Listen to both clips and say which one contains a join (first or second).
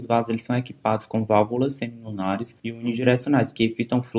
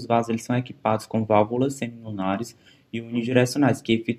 first